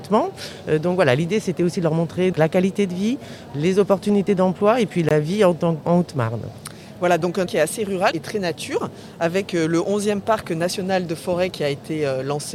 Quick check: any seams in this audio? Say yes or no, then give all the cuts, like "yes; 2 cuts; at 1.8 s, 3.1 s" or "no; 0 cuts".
yes; 5 cuts; at 2.3 s, 5.8 s, 7.5 s, 8.1 s, 11.5 s